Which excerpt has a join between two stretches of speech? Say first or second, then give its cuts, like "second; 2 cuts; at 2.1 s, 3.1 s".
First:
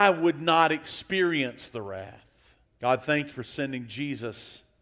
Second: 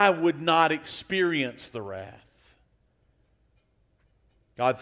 first; 2 cuts; at 2.7 s, 3.3 s